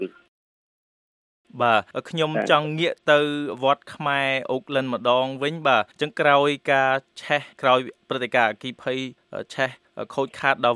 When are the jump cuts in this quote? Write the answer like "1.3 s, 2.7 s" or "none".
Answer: 5.9 s, 7.5 s